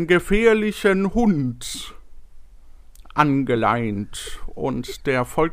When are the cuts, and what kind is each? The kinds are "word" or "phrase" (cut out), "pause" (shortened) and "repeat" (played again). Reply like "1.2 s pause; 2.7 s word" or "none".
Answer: none